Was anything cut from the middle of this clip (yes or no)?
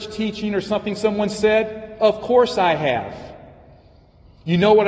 no